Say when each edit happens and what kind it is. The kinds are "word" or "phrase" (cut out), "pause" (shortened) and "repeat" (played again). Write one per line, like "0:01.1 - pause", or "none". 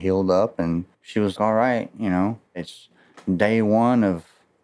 0:00.9 - pause
0:01.4 - word
0:02.5 - pause